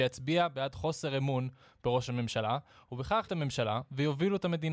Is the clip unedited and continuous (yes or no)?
no